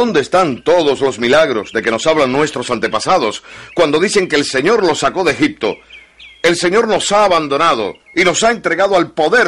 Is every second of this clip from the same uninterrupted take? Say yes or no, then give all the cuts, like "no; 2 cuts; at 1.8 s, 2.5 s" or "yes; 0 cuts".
no; 1 cut; at 8.0 s